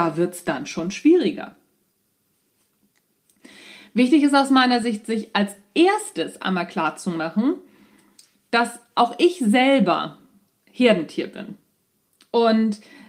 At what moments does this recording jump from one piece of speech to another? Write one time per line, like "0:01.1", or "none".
none